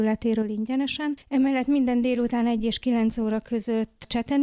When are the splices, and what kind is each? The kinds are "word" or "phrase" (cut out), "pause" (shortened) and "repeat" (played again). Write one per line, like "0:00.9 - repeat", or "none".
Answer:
0:01.2 - pause